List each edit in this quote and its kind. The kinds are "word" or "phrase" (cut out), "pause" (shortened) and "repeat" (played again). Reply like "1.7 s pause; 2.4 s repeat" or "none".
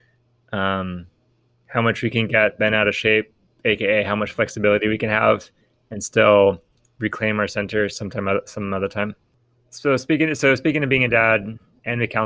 none